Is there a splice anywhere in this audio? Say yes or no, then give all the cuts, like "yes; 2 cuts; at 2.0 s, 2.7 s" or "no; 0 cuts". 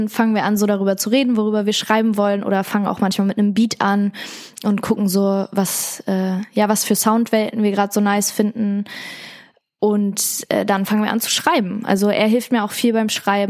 no; 0 cuts